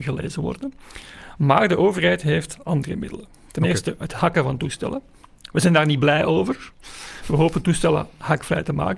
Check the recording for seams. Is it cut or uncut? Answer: uncut